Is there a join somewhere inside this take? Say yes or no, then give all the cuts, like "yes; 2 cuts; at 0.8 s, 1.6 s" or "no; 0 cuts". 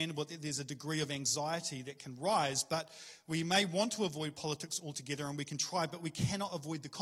no; 0 cuts